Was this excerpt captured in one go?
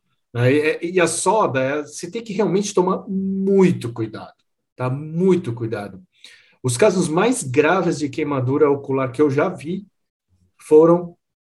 yes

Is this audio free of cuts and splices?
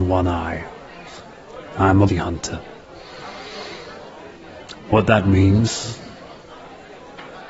no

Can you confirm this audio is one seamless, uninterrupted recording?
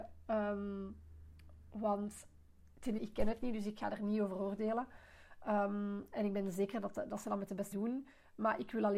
no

